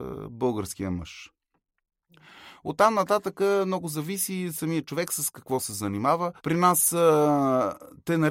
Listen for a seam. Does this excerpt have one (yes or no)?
yes